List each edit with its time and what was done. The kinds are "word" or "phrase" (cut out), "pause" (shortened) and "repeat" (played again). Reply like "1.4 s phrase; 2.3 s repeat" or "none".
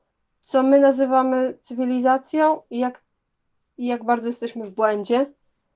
none